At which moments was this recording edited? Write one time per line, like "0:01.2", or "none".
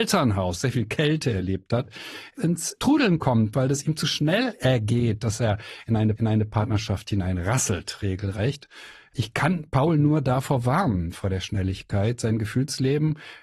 0:03.2
0:06.2